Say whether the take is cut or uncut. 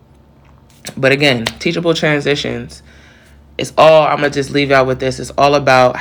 uncut